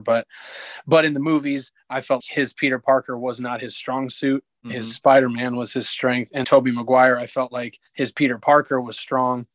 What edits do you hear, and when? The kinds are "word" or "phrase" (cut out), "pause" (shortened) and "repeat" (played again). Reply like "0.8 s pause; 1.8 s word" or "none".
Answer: 2.2 s word; 6.4 s word; 7.9 s pause